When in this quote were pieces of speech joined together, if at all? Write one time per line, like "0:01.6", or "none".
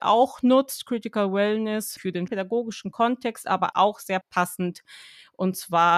0:02.0
0:02.3
0:03.7
0:04.2